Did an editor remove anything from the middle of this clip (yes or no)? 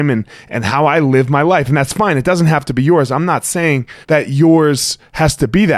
yes